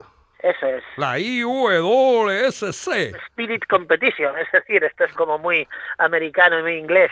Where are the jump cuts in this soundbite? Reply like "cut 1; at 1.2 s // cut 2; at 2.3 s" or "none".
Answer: cut 1; at 5.1 s